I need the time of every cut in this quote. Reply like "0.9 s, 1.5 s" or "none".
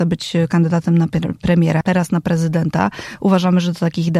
1.8 s